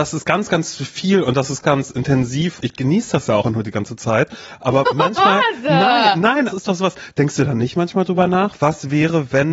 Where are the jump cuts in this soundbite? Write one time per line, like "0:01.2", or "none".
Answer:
0:01.6
0:02.6
0:03.4
0:06.5